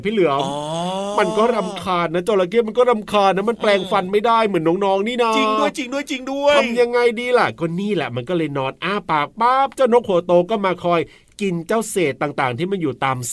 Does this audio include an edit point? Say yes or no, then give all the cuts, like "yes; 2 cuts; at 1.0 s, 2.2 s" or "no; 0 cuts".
no; 0 cuts